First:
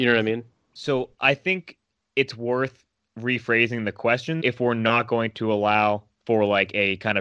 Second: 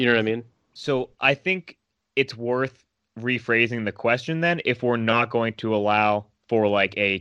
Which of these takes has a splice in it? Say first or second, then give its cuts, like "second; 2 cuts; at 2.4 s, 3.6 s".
first; 1 cut; at 4.4 s